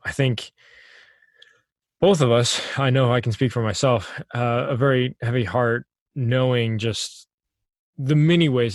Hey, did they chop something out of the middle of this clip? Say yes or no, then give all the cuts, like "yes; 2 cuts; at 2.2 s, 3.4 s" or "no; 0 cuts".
no; 0 cuts